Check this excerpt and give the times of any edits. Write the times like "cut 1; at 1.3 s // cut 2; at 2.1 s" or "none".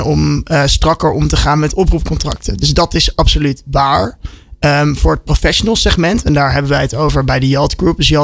none